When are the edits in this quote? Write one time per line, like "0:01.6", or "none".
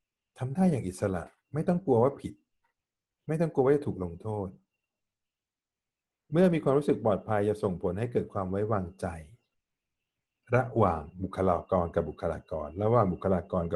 none